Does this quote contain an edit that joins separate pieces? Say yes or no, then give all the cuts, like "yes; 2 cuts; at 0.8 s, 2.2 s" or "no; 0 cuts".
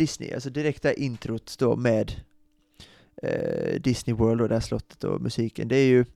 no; 0 cuts